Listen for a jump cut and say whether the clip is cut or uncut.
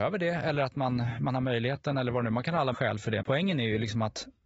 cut